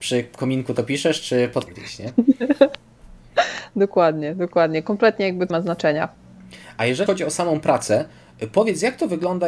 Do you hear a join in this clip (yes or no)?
yes